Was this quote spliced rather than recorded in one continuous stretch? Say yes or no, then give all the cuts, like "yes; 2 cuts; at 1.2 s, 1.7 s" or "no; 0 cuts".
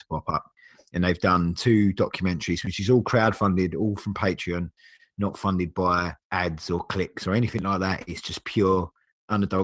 yes; 1 cut; at 6.2 s